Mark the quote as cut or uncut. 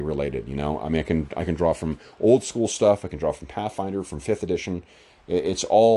uncut